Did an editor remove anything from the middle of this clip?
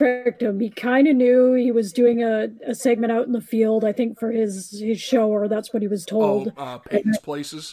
no; 0 cuts

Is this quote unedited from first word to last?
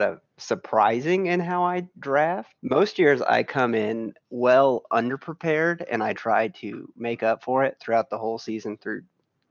no; 1 cut; at 2.6 s

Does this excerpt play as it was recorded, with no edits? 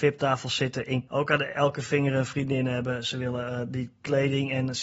no; 1 cut; at 1.1 s

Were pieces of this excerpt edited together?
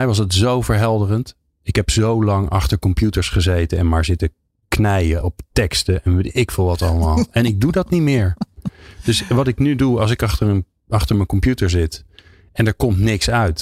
no; 0 cuts

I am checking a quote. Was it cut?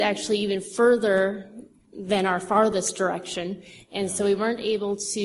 no; 0 cuts

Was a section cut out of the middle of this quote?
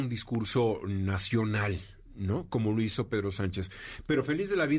no; 0 cuts

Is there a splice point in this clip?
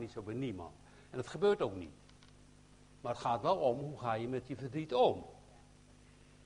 no; 0 cuts

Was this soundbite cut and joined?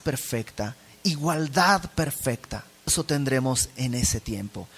yes; 1 cut; at 2.9 s

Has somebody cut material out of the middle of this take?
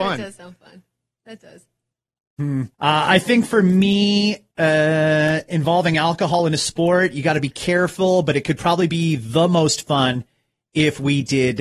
yes; 2 cuts; at 2.7 s, 4.5 s

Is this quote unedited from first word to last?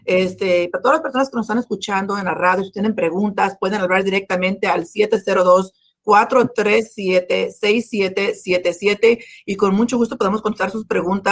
yes; 0 cuts

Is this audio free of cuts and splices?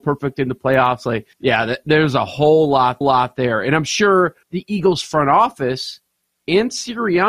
no; 3 cuts; at 1.3 s, 3.0 s, 4.4 s

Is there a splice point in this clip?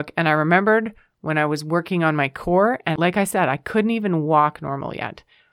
no; 0 cuts

